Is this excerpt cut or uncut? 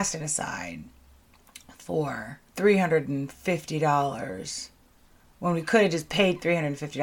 cut